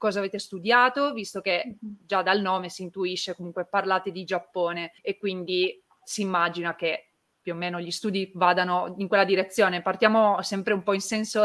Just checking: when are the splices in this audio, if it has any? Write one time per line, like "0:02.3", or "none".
0:05.0